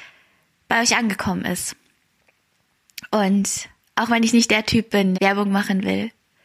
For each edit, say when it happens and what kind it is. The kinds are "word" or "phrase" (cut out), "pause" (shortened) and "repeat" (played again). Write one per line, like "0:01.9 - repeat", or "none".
0:03.8 - pause
0:05.1 - word